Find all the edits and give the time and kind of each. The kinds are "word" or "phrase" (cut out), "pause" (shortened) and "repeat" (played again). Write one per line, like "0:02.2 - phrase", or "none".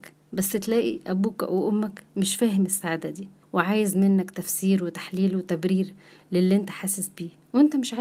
0:02.1 - pause
0:03.4 - pause